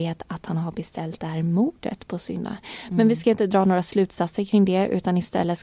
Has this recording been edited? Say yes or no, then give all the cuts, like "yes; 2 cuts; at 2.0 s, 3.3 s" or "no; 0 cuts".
no; 0 cuts